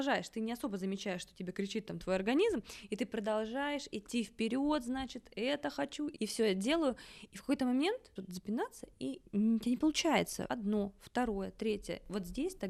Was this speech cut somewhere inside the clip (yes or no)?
yes